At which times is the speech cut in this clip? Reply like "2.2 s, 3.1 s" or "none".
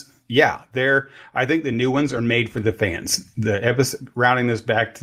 none